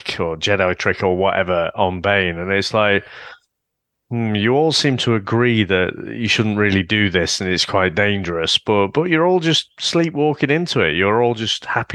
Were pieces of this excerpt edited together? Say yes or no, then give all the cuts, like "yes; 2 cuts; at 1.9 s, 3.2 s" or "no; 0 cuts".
no; 0 cuts